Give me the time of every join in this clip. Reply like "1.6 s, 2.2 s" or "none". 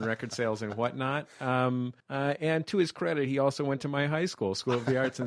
2.0 s